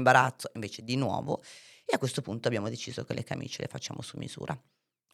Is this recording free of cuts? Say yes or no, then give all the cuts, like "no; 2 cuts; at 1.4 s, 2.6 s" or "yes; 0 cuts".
yes; 0 cuts